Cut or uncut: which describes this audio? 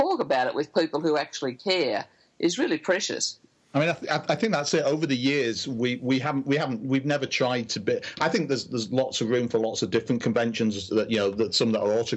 uncut